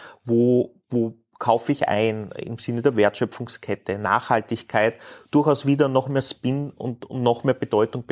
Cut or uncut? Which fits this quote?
uncut